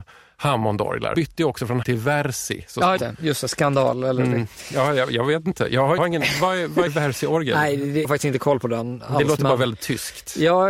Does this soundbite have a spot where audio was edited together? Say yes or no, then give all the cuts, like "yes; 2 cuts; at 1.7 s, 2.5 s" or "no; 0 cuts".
yes; 6 cuts; at 1.1 s, 1.8 s, 3.0 s, 6.0 s, 6.9 s, 8.0 s